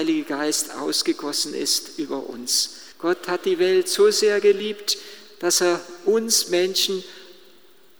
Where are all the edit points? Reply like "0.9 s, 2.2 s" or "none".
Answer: 2.9 s